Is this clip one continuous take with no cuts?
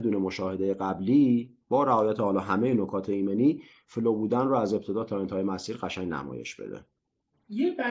yes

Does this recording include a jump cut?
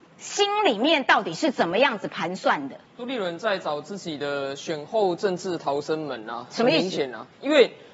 yes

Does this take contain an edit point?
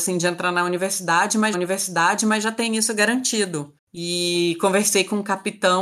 yes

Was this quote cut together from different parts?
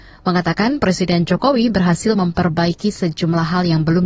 no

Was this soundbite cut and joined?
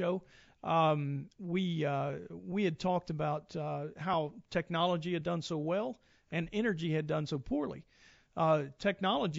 no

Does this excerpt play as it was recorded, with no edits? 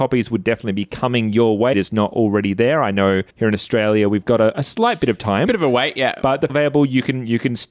no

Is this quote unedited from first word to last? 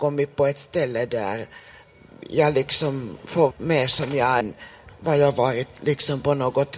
no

